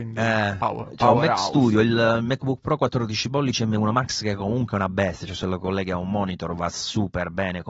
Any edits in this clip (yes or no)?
no